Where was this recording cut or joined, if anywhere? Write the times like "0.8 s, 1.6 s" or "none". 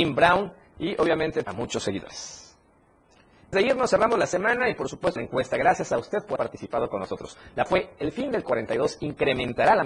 1.4 s, 3.5 s, 5.2 s, 6.4 s, 7.7 s, 8.4 s